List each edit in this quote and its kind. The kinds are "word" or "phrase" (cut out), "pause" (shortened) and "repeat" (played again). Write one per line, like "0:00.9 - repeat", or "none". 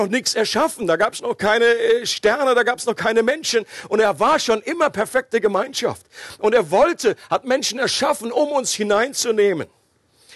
none

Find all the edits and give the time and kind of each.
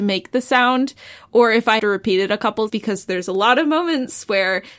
0:01.8 - word
0:02.7 - word

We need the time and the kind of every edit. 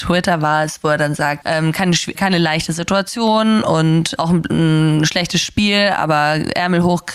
0:01.4 - word
0:02.1 - word
0:04.2 - word

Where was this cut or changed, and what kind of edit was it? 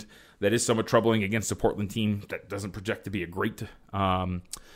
none

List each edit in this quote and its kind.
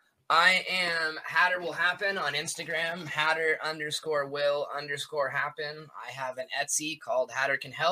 none

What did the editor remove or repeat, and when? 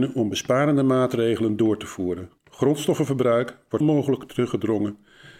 0:02.4 - pause
0:03.8 - word

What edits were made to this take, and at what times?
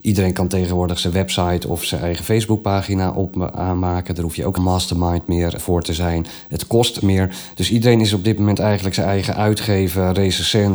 0:04.6 - phrase
0:05.6 - word
0:07.0 - word

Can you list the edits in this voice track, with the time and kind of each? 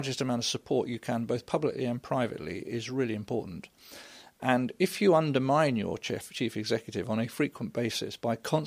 none

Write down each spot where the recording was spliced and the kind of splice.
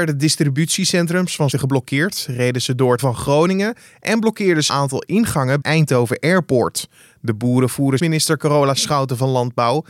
0:01.5 - word
0:03.0 - word
0:04.7 - word
0:05.6 - word
0:08.0 - phrase

